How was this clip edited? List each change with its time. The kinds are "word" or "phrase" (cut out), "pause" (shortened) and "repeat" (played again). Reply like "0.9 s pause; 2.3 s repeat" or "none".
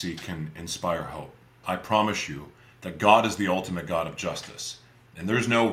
1.6 s word; 2.7 s pause